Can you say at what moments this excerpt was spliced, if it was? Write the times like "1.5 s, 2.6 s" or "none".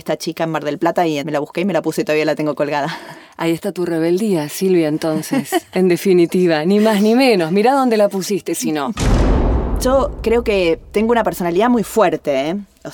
1.2 s